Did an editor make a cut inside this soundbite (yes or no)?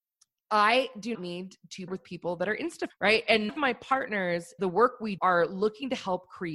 yes